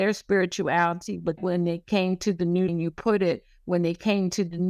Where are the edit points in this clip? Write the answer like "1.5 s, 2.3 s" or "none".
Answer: 1.4 s, 2.7 s